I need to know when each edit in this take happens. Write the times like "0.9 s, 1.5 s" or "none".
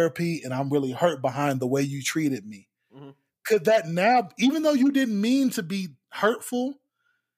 none